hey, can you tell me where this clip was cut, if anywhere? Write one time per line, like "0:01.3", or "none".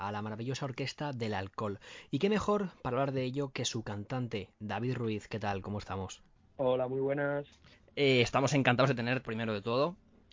0:09.2